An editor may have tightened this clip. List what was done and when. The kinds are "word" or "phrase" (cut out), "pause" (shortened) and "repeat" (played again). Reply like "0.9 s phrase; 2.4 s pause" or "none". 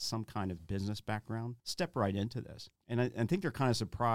1.6 s pause; 2.8 s pause